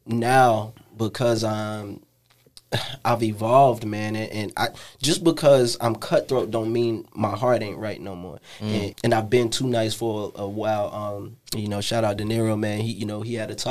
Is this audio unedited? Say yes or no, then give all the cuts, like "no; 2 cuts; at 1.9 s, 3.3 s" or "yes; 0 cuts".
no; 2 cuts; at 8.9 s, 11.5 s